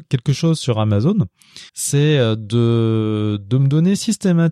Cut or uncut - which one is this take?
cut